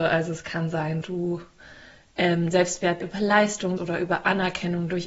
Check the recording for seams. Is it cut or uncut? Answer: cut